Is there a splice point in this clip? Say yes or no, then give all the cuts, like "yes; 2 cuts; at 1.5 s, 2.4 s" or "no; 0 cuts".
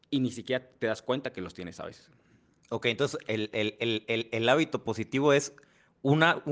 no; 0 cuts